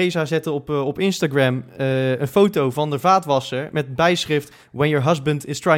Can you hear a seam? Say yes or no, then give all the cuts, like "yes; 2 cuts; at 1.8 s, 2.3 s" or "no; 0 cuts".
no; 0 cuts